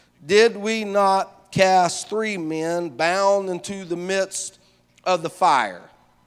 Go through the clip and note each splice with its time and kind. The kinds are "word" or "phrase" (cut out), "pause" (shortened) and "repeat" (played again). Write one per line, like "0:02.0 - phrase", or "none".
none